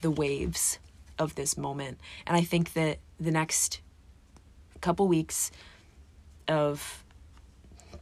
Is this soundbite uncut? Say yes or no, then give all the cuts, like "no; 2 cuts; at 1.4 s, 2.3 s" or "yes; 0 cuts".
no; 2 cuts; at 3.1 s, 4.7 s